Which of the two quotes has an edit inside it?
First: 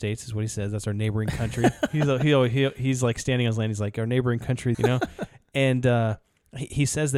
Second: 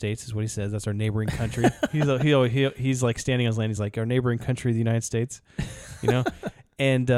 first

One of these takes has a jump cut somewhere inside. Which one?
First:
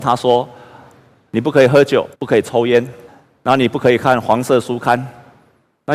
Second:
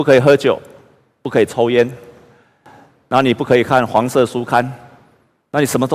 first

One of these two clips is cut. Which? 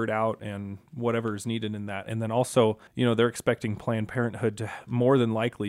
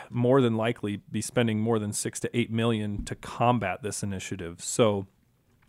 first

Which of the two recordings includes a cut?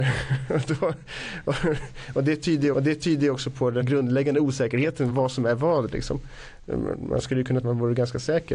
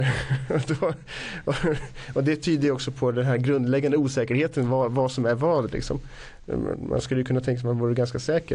first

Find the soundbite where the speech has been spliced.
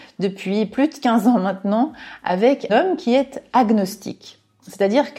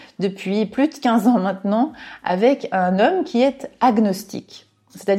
first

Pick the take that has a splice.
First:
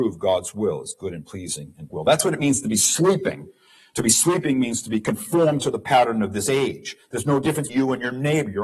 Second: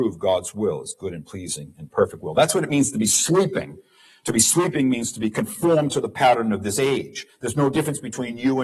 first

